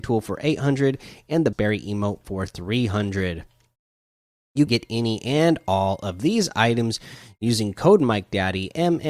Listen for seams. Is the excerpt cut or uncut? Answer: cut